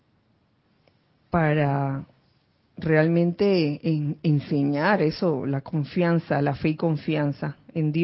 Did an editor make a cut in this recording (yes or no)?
no